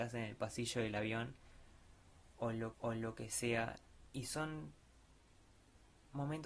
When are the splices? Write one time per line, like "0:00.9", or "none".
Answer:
0:02.7